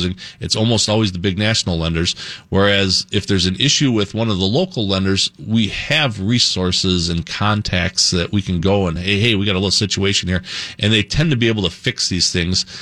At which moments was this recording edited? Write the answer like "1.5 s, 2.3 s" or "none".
none